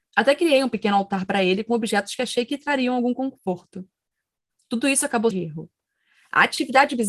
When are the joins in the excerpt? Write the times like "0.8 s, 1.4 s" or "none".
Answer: 5.3 s